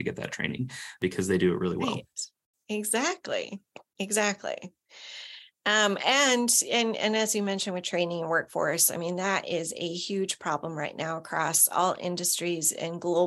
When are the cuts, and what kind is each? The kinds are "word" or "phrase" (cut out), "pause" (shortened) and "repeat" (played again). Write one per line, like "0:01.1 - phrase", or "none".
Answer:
none